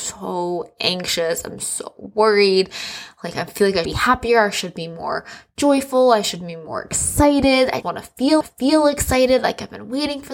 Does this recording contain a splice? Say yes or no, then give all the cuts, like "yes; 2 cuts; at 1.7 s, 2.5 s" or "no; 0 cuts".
yes; 3 cuts; at 3.8 s, 7.8 s, 8.4 s